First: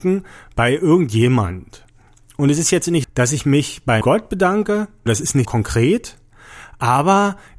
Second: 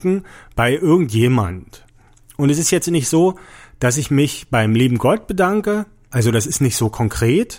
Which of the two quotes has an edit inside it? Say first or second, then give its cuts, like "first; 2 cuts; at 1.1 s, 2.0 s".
first; 4 cuts; at 3.0 s, 4.0 s, 5.1 s, 5.4 s